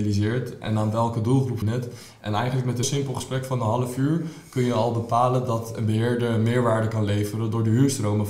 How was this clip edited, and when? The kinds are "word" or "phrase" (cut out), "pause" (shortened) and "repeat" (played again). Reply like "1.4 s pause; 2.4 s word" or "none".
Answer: 1.6 s word; 2.8 s word